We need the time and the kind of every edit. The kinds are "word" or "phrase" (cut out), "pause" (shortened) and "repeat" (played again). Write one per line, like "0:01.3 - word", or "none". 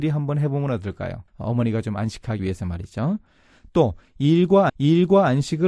0:01.3 - pause
0:02.4 - word
0:04.7 - repeat